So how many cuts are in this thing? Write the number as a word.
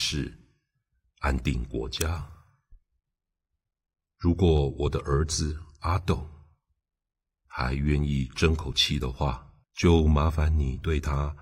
one